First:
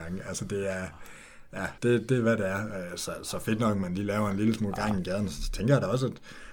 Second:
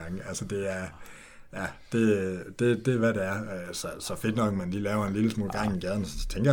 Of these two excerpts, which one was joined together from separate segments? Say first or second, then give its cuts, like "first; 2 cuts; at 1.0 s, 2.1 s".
first; 1 cut; at 1.8 s